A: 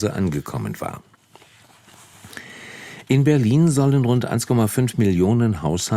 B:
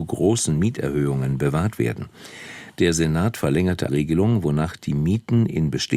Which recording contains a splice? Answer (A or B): B